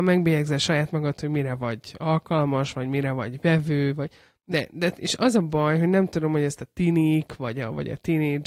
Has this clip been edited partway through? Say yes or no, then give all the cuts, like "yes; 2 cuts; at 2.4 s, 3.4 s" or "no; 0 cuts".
no; 0 cuts